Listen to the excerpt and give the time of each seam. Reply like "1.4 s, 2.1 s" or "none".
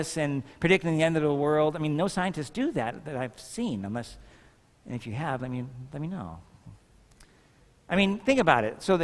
none